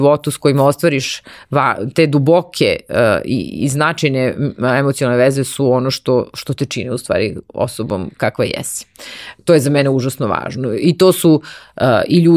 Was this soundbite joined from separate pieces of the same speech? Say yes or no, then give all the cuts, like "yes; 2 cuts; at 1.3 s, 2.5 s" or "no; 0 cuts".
no; 0 cuts